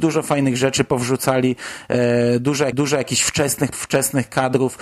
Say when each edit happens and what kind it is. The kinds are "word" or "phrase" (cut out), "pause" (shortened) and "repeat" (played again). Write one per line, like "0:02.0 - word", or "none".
0:02.7 - repeat
0:03.7 - word